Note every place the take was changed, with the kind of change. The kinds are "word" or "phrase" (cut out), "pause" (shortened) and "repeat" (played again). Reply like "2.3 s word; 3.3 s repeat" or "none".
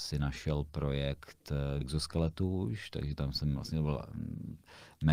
1.8 s word